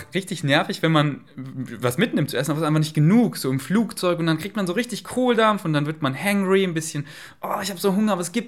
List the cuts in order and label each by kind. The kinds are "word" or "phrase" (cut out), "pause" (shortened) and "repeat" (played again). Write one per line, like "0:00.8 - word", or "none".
none